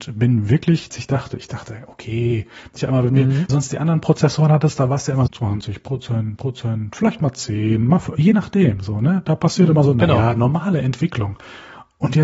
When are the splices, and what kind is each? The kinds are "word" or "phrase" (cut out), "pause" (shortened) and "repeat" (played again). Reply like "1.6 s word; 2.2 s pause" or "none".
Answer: 0.9 s phrase; 2.8 s word; 3.5 s phrase; 5.3 s word; 6.4 s repeat